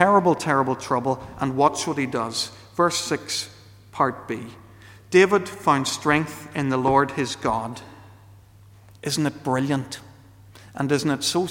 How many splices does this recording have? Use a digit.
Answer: 0